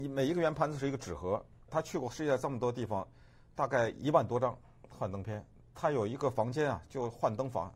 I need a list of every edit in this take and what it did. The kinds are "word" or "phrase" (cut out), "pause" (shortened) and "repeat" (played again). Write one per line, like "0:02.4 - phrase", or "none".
0:01.7 - word